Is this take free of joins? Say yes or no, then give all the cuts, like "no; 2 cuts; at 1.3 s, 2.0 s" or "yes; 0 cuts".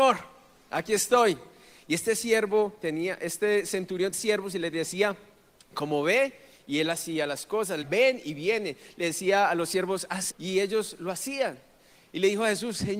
no; 3 cuts; at 4.1 s, 7.8 s, 10.3 s